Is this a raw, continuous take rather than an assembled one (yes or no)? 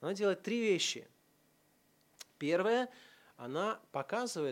yes